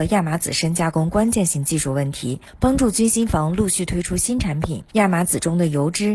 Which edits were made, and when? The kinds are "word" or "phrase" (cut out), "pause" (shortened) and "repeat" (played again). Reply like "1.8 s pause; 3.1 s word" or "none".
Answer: 4.9 s pause